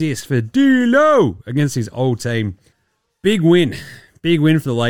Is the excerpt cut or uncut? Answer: cut